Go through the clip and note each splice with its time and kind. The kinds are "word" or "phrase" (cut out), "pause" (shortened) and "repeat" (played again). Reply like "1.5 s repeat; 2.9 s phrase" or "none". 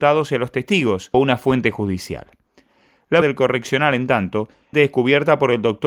1.1 s word; 3.2 s word; 4.7 s word